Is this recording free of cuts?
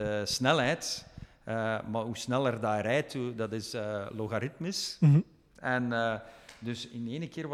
yes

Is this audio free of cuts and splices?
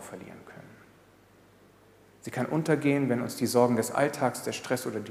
yes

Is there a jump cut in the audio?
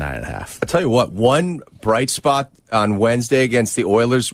no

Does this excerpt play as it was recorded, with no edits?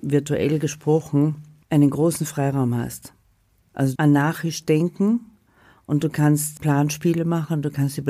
no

